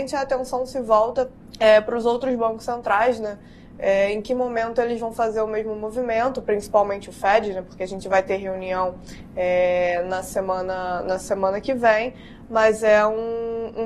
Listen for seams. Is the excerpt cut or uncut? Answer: cut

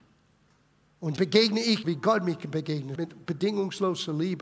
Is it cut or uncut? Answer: cut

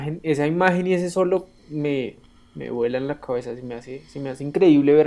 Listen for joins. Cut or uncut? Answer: uncut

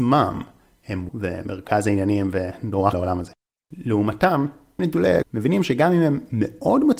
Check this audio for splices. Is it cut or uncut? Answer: cut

